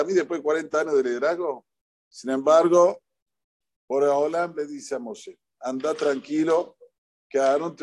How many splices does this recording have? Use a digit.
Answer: 0